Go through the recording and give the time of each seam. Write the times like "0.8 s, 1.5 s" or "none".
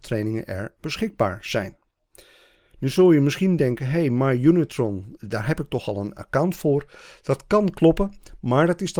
5.2 s

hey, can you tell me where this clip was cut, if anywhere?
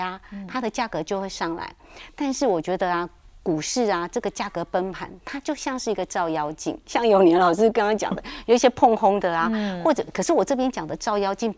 none

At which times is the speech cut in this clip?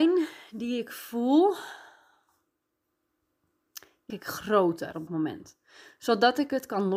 4.1 s, 5.1 s

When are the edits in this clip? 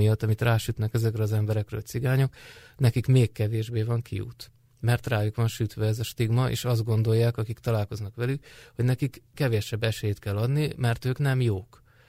none

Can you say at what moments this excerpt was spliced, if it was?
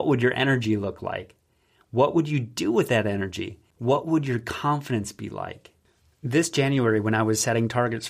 none

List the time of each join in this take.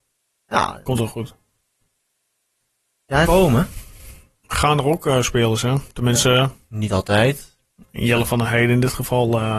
3.2 s

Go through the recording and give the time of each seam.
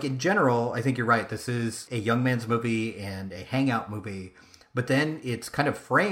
1.9 s

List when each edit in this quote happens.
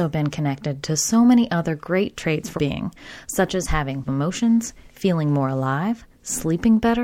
2.6 s, 4.1 s

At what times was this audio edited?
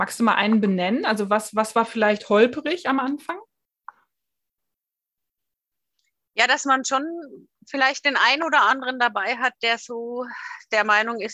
none

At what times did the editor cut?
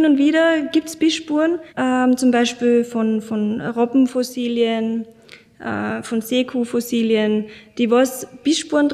1.7 s

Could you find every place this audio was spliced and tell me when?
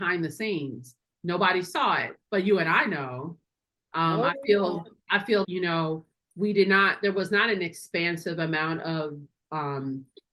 2.2 s, 5.4 s

